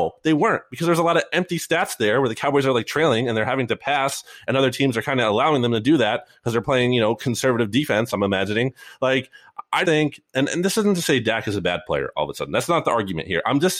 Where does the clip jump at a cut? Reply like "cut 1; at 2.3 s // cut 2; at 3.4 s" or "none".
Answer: cut 1; at 9.8 s